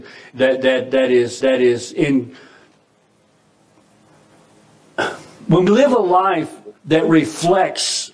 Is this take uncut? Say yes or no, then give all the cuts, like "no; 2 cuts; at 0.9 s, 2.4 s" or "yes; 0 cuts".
no; 3 cuts; at 1.4 s, 5.7 s, 6.8 s